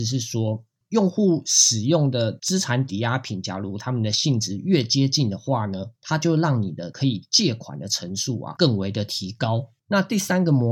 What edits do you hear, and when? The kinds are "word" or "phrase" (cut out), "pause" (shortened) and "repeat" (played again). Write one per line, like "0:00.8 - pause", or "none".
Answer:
0:06.0 - pause
0:09.8 - pause